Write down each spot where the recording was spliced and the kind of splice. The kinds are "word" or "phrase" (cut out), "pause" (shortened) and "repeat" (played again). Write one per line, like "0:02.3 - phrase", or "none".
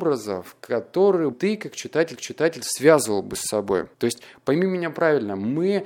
0:01.3 - word
0:02.1 - repeat
0:03.9 - pause